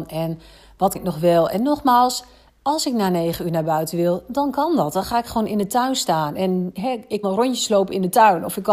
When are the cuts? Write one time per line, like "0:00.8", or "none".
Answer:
0:01.0
0:07.2